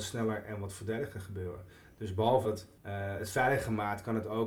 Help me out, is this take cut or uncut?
cut